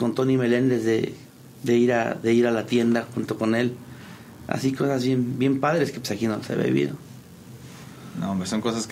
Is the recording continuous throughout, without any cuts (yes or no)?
yes